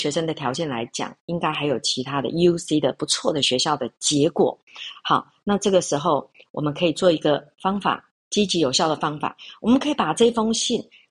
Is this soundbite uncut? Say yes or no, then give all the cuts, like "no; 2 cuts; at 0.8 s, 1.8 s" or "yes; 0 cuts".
yes; 0 cuts